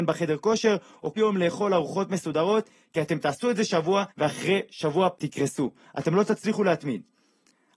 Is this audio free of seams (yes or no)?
no